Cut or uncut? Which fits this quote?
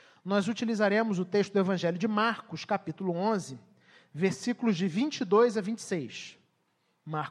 uncut